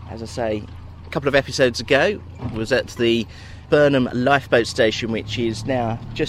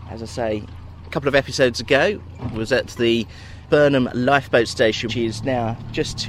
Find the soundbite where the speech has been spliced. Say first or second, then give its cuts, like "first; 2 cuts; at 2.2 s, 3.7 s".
second; 1 cut; at 5.1 s